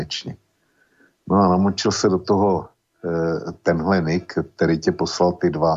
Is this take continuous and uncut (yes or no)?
yes